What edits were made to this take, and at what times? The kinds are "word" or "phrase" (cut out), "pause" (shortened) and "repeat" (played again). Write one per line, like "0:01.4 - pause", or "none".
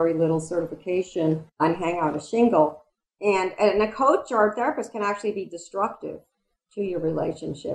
none